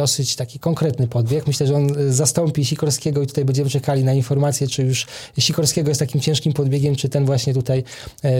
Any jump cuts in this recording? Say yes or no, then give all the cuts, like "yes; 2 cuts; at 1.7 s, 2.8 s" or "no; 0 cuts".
no; 0 cuts